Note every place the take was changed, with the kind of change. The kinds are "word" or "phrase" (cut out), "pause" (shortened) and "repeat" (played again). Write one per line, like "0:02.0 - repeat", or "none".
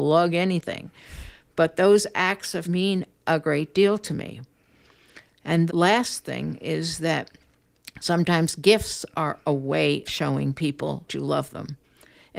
0:02.6 - word
0:05.7 - word
0:10.0 - word
0:11.1 - word